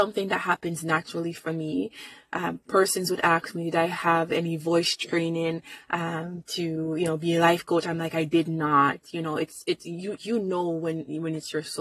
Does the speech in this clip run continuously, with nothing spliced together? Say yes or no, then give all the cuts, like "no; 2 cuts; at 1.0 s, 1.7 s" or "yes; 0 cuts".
yes; 0 cuts